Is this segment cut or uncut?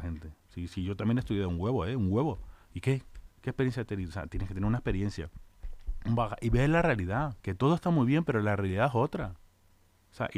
cut